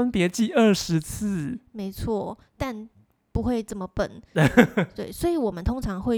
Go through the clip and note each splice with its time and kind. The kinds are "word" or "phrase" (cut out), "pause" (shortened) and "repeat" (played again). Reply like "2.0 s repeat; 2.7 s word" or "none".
2.5 s pause